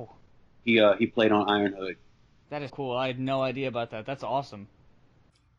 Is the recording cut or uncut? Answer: cut